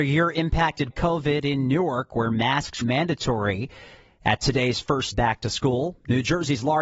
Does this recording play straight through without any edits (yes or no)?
no